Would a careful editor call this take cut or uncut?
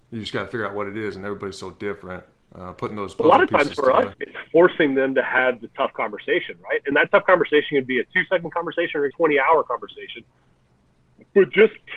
cut